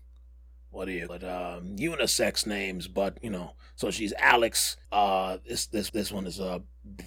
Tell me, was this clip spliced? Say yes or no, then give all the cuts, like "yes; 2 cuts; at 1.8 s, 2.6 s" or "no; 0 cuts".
yes; 3 cuts; at 1.1 s, 4.8 s, 5.9 s